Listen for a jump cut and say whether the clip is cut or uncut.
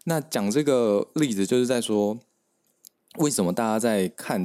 uncut